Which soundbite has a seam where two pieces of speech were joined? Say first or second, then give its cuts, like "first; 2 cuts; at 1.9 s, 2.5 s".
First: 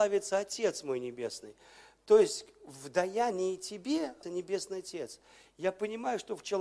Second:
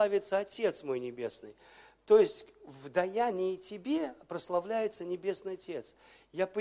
first; 1 cut; at 4.2 s